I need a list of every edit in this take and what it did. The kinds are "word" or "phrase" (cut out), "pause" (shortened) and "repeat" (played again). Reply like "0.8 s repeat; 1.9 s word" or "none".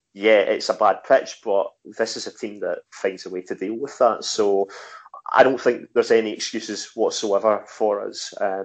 none

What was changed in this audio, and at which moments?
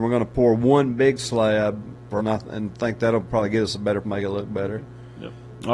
2.2 s phrase; 4.0 s word

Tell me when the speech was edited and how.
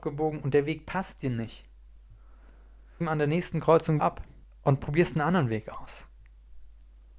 3.0 s phrase; 4.0 s word; 4.4 s pause

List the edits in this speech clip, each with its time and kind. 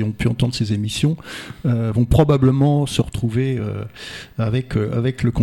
none

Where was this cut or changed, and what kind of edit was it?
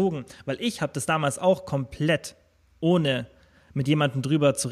none

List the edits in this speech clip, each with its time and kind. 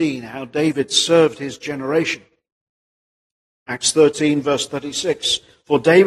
none

